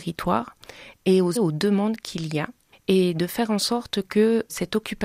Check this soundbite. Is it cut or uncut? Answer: cut